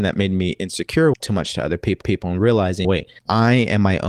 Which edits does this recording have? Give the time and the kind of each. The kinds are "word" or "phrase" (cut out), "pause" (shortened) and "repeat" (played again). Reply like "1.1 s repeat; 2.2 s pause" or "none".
1.2 s phrase; 2.0 s repeat; 2.8 s word; 3.2 s pause